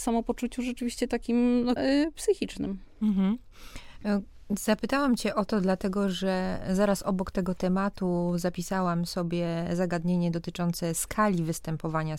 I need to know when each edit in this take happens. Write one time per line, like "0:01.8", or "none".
0:01.8

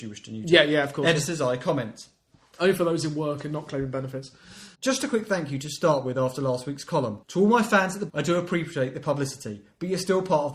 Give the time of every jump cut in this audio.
0:04.7
0:07.2
0:08.1

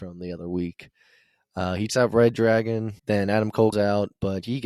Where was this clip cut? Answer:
0:01.9
0:03.0
0:03.7

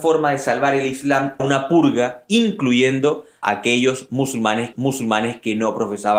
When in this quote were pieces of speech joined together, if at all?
0:01.4
0:03.4
0:04.7

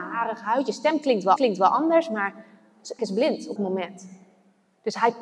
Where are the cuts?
0:01.4
0:03.0
0:03.6

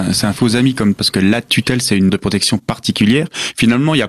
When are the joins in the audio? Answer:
0:01.0
0:02.1

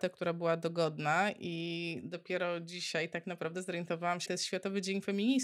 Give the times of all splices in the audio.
0:04.3

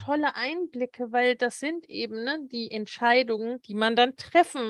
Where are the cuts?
none

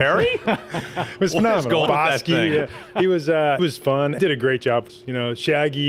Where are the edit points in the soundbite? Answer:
0:01.9
0:02.8
0:03.6
0:04.2
0:04.9

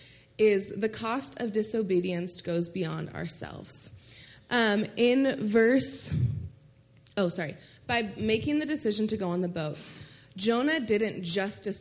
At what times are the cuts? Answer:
none

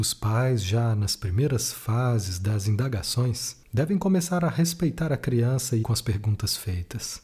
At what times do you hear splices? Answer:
0:03.6
0:05.8

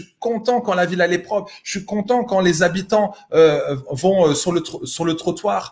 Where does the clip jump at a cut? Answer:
none

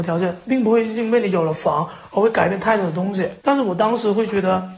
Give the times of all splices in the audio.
0:03.4

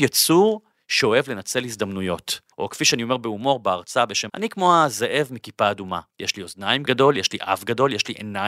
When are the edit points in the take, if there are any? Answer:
0:02.5
0:04.3
0:06.1
0:06.8

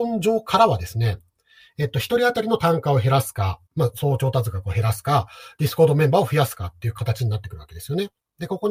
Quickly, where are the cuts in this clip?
0:03.7

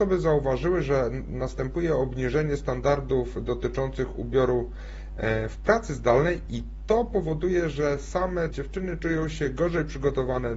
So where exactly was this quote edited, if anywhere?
0:08.5

